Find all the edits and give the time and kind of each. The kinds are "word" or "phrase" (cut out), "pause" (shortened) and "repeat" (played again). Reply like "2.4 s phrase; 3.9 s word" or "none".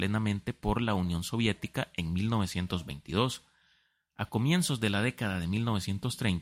none